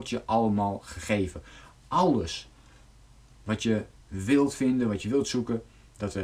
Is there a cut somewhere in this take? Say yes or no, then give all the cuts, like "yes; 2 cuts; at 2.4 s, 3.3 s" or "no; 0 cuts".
no; 0 cuts